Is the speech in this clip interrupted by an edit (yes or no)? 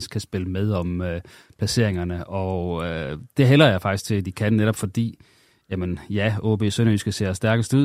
no